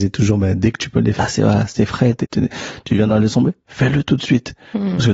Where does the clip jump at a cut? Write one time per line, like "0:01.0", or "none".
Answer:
0:01.2
0:02.2
0:03.1